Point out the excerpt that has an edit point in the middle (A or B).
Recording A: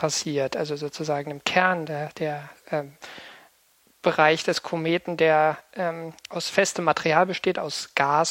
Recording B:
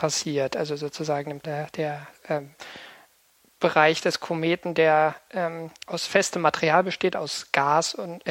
B